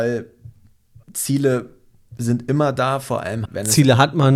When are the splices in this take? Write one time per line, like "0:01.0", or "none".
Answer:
0:01.0
0:03.4